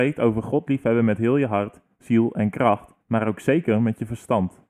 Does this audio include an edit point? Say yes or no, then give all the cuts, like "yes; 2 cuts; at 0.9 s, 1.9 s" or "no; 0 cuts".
yes; 1 cut; at 3.0 s